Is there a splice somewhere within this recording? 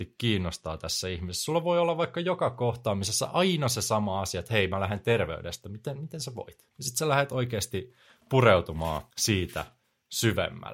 yes; 2 cuts; at 6.7 s, 9.1 s

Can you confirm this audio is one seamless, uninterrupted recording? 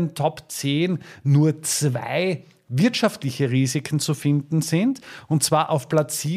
yes; 0 cuts

